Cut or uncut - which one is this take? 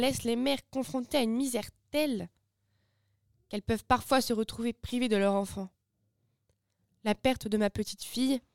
uncut